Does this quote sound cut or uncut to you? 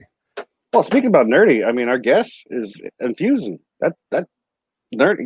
uncut